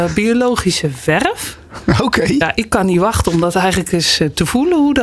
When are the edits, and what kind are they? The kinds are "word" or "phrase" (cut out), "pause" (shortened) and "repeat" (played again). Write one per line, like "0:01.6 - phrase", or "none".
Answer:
none